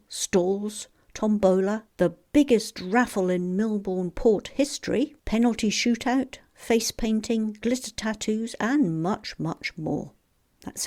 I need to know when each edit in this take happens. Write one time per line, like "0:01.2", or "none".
0:01.9
0:05.2